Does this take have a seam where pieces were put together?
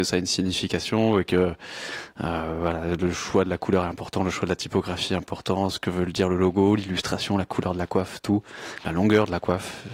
no; 0 cuts

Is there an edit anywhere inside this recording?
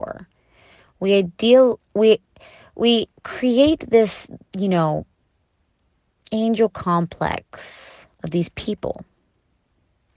yes; 4 cuts; at 1.9 s, 3.1 s, 4.5 s, 8.1 s

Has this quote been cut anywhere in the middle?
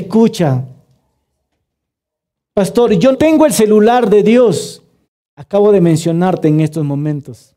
yes; 2 cuts; at 3.1 s, 5.0 s

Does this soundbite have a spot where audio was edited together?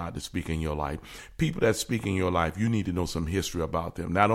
no; 0 cuts

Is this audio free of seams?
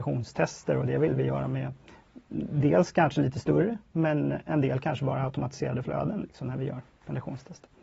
yes; 0 cuts

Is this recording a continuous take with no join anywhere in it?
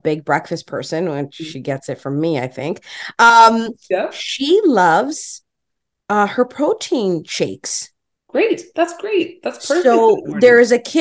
yes; 0 cuts

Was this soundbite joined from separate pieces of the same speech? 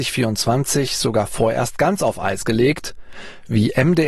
no; 0 cuts

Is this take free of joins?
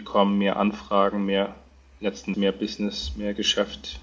no; 1 cut; at 2.3 s

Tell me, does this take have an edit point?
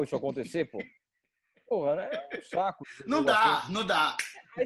no; 0 cuts

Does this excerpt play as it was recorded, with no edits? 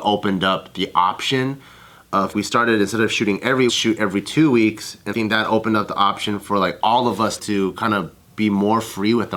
no; 4 cuts; at 2.3 s, 3.7 s, 5.1 s, 7.4 s

